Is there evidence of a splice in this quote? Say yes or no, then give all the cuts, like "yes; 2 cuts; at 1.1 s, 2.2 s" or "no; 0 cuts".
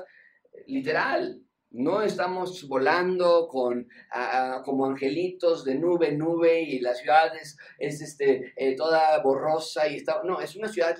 no; 0 cuts